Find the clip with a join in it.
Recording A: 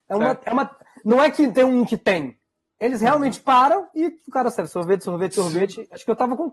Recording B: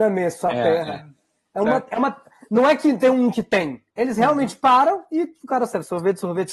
B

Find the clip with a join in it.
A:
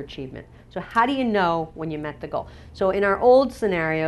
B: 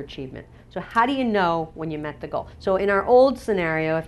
B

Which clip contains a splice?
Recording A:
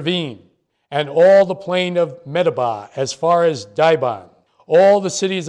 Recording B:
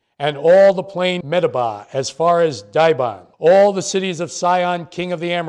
B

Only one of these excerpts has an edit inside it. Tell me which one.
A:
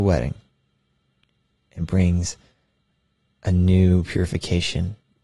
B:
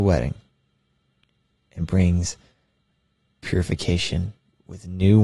B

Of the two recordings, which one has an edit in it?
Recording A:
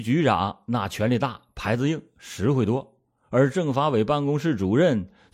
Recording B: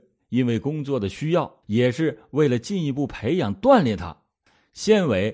B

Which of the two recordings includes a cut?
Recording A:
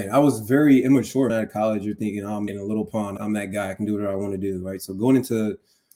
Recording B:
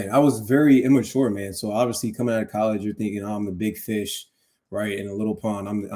A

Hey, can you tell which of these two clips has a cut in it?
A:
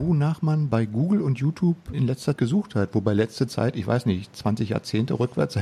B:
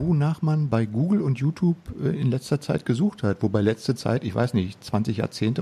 A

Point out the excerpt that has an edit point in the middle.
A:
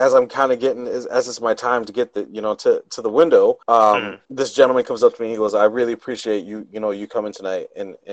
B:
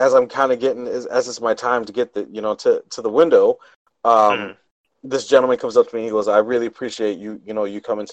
A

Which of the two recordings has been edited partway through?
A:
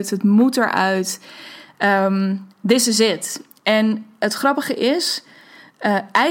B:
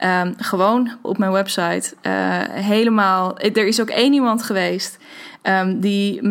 B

